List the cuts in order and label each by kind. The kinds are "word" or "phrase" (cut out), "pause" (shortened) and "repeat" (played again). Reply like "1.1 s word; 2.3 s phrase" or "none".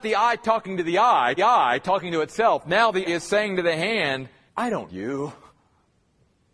1.4 s repeat; 3.1 s word; 4.5 s pause; 4.9 s word